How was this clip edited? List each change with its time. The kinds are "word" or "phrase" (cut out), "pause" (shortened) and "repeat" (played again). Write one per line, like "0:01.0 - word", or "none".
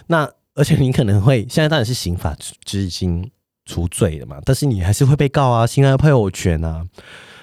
0:03.5 - pause